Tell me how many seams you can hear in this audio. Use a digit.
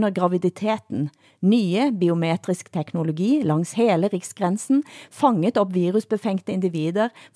0